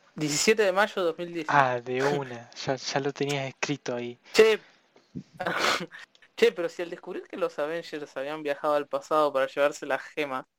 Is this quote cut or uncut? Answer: uncut